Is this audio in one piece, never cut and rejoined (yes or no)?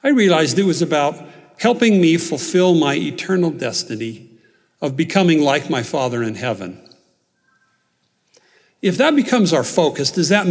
yes